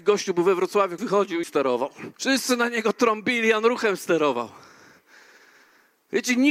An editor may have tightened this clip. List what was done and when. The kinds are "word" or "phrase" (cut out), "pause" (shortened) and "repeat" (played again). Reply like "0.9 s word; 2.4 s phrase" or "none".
1.0 s word; 1.4 s word; 2.1 s pause